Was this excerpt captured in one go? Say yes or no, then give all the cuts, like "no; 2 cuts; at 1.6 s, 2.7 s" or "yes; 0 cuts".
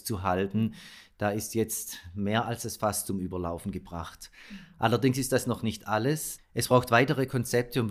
yes; 0 cuts